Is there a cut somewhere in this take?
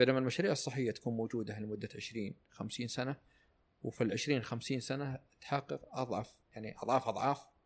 no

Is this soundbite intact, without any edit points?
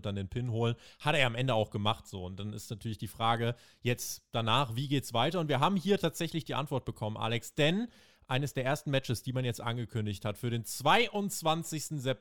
yes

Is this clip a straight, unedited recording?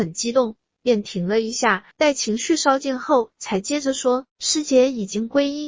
no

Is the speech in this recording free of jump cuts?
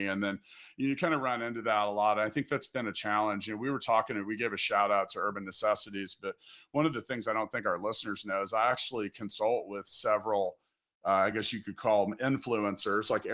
yes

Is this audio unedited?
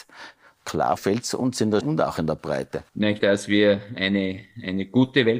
no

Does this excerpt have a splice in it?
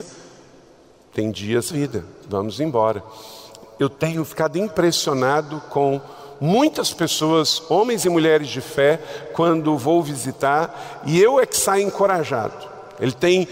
yes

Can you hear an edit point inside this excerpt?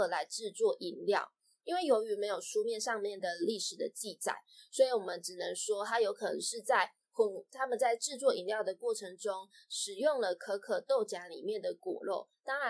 no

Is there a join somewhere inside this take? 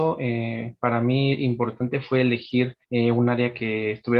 yes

